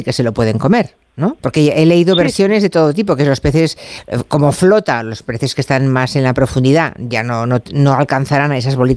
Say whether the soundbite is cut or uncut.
cut